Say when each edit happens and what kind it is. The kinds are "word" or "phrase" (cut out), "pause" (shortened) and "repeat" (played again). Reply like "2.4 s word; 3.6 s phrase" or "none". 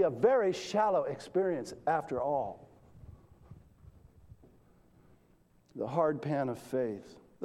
none